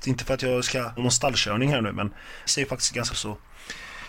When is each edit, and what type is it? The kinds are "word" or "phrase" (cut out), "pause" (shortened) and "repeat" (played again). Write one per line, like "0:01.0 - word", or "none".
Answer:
0:01.0 - word
0:02.5 - word
0:03.1 - word